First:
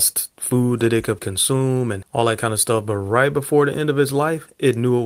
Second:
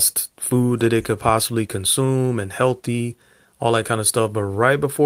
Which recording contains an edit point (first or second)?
first